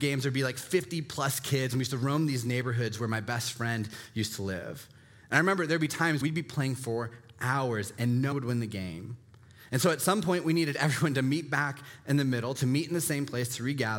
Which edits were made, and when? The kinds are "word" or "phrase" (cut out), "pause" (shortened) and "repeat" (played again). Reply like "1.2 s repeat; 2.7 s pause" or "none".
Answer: 6.2 s word; 8.3 s word